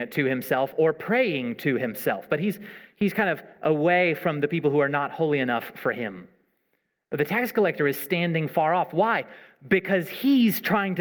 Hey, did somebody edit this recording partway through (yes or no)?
no